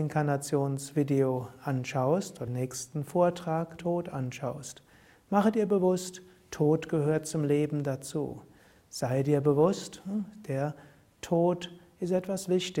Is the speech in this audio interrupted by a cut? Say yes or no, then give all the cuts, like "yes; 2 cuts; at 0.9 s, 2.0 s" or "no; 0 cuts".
yes; 2 cuts; at 2.5 s, 3.8 s